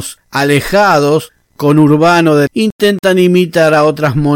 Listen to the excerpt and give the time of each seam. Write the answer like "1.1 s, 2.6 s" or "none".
1.6 s, 2.5 s